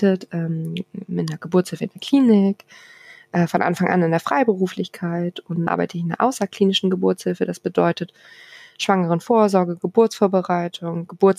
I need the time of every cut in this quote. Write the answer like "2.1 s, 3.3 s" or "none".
5.7 s